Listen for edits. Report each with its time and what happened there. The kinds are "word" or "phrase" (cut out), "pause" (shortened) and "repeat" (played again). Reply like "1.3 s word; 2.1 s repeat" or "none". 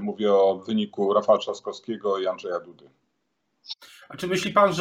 none

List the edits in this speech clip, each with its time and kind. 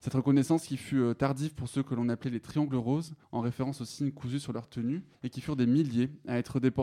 3.2 s pause; 5.1 s pause

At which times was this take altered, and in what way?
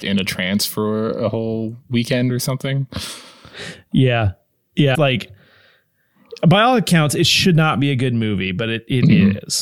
4.9 s phrase

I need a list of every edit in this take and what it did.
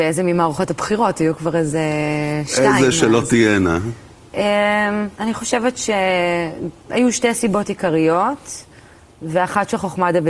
5.1 s pause; 6.8 s pause

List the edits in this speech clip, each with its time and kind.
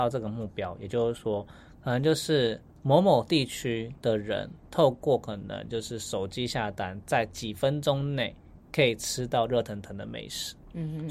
4.0 s pause

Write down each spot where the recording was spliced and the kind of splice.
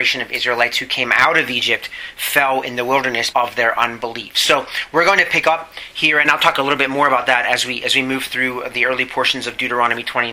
3.3 s word; 6.2 s word

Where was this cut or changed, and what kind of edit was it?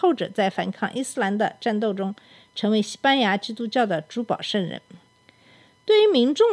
none

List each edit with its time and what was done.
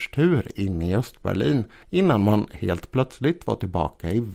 1.8 s pause

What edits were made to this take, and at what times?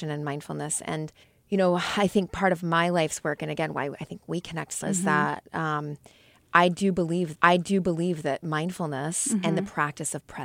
1.2 s pause; 4.8 s word; 7.3 s repeat

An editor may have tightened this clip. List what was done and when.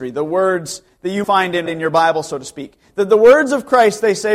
1.2 s word; 1.7 s word

